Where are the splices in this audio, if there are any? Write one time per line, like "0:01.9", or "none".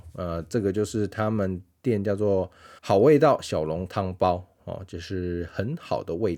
0:02.8